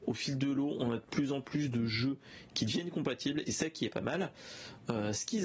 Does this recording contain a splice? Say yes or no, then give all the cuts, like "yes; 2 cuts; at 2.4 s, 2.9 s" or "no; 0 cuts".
yes; 1 cut; at 3.5 s